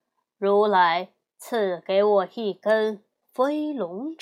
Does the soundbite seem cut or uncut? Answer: uncut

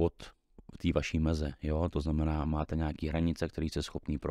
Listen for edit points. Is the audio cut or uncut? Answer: uncut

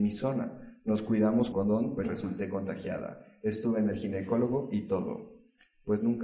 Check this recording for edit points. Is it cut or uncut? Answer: cut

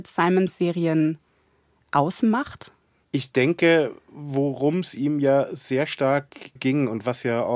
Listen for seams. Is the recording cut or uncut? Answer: cut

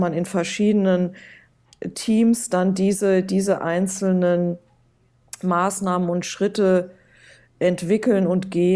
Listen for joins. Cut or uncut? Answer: uncut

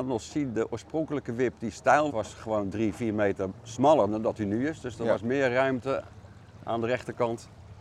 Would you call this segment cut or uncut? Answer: cut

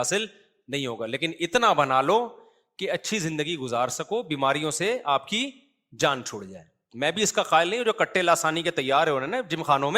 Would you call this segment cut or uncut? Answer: uncut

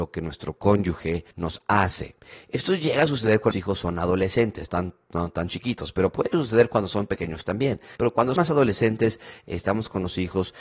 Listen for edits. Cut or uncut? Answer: cut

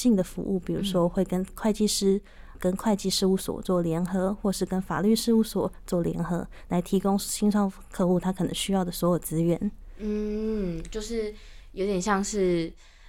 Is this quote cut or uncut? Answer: cut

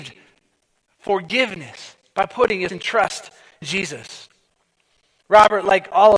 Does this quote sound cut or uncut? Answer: cut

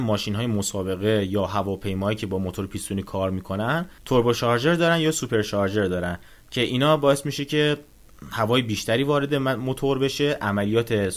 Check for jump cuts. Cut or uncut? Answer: uncut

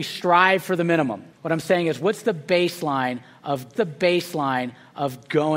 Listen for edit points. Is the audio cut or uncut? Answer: cut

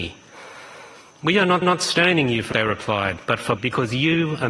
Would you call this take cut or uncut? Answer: cut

